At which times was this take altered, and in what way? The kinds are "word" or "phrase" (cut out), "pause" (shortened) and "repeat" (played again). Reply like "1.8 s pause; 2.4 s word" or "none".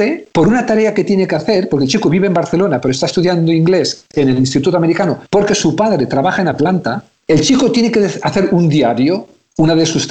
5.3 s pause